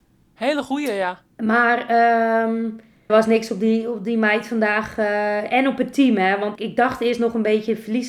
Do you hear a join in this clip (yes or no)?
yes